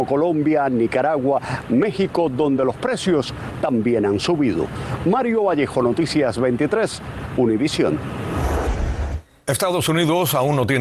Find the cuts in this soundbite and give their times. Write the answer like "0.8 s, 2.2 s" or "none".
none